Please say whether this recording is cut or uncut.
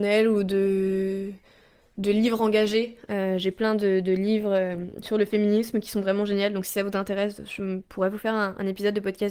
uncut